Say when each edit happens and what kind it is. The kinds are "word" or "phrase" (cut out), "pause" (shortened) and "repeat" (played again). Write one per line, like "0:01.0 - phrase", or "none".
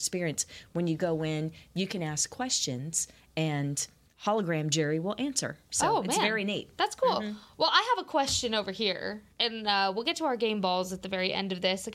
0:04.1 - pause
0:09.3 - pause